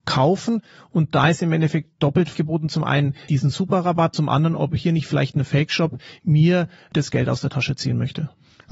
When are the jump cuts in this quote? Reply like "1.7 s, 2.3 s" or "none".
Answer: 2.3 s, 3.3 s, 4.1 s